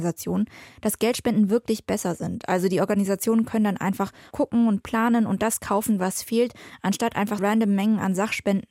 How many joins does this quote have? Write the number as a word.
two